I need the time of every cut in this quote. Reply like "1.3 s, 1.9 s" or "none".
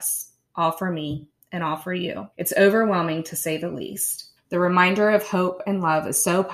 2.3 s, 4.4 s